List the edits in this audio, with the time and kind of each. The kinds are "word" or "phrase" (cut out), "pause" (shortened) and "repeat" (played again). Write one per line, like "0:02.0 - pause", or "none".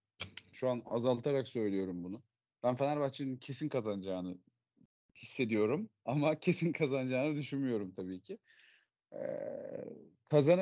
none